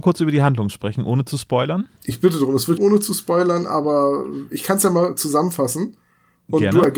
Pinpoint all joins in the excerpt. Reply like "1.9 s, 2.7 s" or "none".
2.0 s, 2.8 s